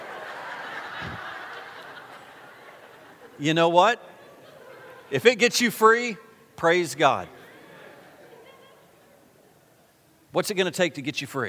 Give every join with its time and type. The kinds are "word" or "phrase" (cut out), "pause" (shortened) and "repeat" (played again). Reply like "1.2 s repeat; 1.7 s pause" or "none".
none